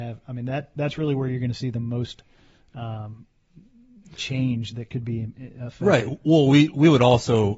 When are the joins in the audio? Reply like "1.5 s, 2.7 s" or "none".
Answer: none